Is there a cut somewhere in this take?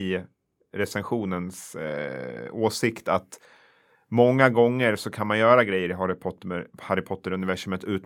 no; 0 cuts

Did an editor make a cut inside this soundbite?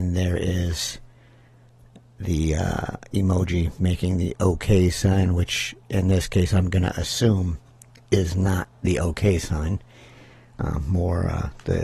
no; 0 cuts

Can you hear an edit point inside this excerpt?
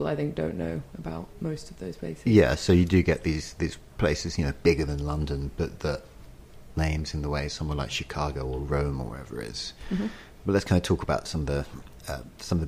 yes; 1 cut; at 6.7 s

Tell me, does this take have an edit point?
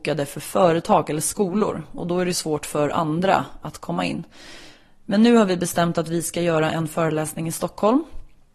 no; 0 cuts

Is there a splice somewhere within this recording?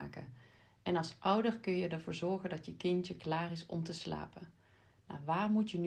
no; 0 cuts

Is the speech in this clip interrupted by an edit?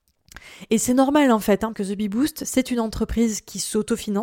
yes; 1 cut; at 1.7 s

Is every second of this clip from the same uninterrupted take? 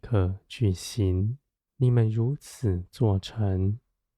no; 1 cut; at 1.6 s

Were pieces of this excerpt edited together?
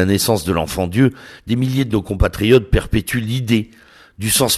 no; 0 cuts

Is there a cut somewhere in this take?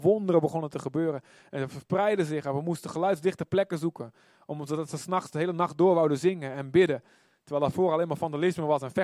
no; 0 cuts

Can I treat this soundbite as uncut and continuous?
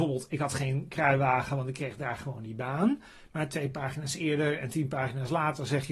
yes; 0 cuts

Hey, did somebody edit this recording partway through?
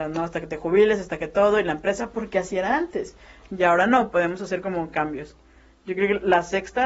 no; 0 cuts

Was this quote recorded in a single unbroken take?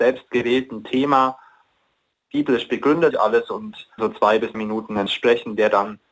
no; 4 cuts; at 3.1 s, 4.0 s, 4.5 s, 5.1 s

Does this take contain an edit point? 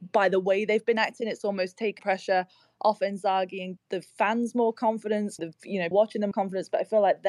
yes; 5 cuts; at 2.0 s, 3.8 s, 5.4 s, 5.9 s, 6.3 s

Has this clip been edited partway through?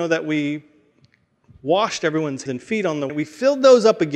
yes; 2 cuts; at 2.5 s, 3.1 s

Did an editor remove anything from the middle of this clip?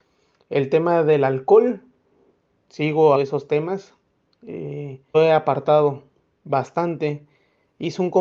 yes; 2 cuts; at 3.1 s, 5.1 s

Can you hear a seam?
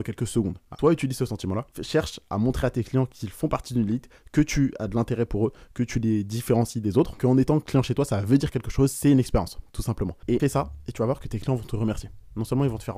no; 0 cuts

